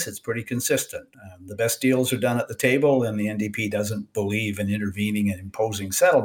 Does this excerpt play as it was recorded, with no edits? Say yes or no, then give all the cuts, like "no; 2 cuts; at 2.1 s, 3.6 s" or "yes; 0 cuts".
no; 1 cut; at 1.1 s